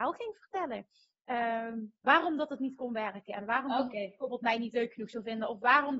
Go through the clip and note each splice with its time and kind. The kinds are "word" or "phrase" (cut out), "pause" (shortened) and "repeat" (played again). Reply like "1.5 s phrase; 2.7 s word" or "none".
none